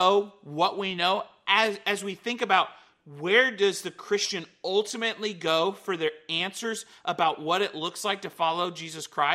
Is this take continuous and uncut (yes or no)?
yes